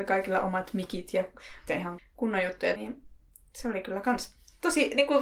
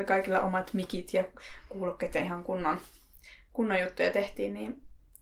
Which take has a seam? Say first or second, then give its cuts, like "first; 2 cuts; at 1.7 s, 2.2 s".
first; 3 cuts; at 1.7 s, 2.0 s, 2.8 s